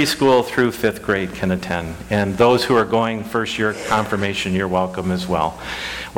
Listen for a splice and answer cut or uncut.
uncut